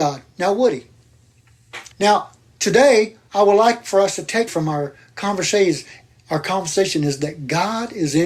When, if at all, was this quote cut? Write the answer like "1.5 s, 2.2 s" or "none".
1.9 s, 4.5 s